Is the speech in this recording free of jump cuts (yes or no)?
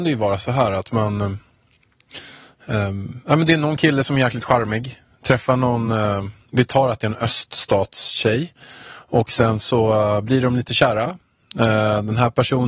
yes